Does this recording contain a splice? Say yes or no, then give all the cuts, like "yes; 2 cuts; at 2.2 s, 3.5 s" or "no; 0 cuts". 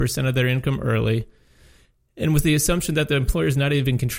no; 0 cuts